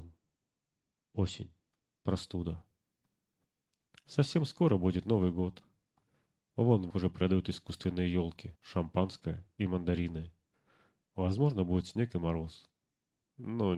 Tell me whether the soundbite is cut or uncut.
cut